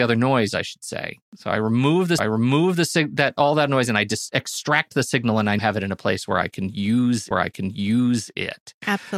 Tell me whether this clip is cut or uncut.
cut